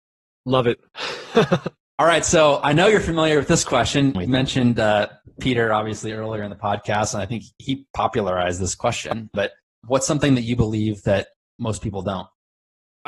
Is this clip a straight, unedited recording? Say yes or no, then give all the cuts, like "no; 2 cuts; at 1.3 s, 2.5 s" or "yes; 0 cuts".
yes; 0 cuts